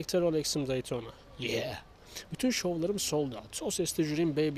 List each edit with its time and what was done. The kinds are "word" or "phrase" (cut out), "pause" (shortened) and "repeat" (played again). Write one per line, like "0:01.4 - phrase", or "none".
none